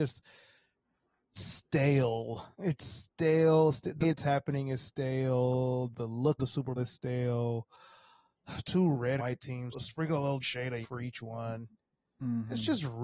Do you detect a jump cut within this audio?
yes; 7 cuts; at 4.0 s, 6.4 s, 6.8 s, 9.2 s, 9.7 s, 10.4 s, 10.8 s

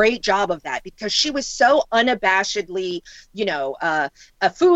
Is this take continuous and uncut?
yes; 0 cuts

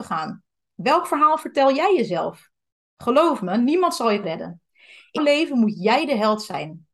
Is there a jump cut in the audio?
yes; 3 cuts; at 2.6 s, 4.2 s, 5.2 s

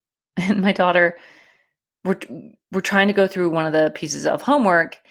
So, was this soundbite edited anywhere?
no; 0 cuts

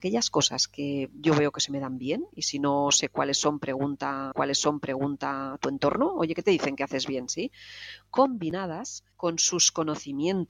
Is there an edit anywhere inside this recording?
yes; 2 cuts; at 4.3 s, 9.1 s

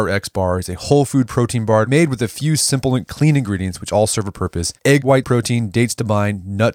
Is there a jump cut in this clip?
yes; 1 cut; at 5.2 s

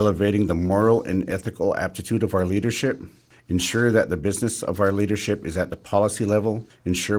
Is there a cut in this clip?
no; 0 cuts

